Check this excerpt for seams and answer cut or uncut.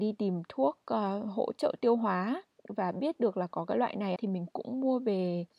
cut